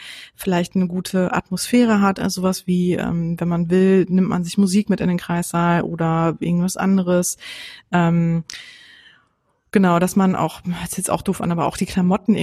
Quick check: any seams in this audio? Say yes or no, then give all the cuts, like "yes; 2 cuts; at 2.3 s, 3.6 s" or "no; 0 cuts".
no; 0 cuts